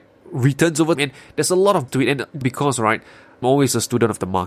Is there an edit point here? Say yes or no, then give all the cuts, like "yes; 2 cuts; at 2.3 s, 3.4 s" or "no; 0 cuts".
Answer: yes; 4 cuts; at 1.0 s, 1.9 s, 2.4 s, 3.4 s